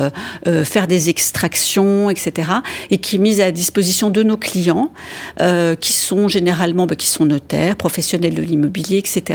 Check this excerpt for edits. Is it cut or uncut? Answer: uncut